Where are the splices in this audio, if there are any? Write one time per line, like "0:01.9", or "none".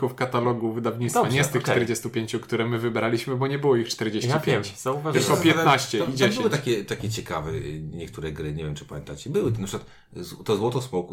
none